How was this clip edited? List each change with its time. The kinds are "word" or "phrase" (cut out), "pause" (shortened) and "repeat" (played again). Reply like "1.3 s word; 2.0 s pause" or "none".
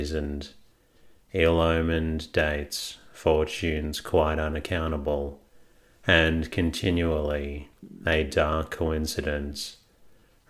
none